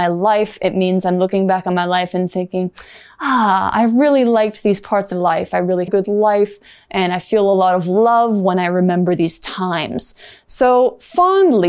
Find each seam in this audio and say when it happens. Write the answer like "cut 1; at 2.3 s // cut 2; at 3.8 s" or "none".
cut 1; at 5.1 s // cut 2; at 5.9 s